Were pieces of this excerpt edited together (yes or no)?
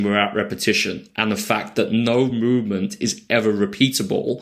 no